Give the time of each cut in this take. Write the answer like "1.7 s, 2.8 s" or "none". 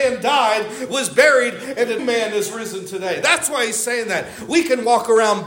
2.0 s